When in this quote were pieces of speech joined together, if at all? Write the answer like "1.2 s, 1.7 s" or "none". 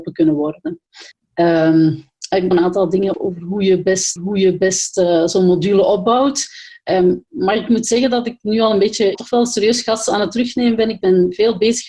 1.1 s, 2.5 s, 3.1 s, 4.2 s, 9.1 s